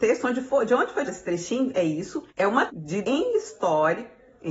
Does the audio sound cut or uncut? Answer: cut